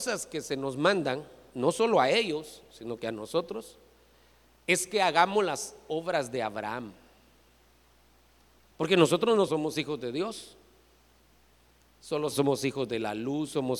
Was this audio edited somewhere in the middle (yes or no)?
yes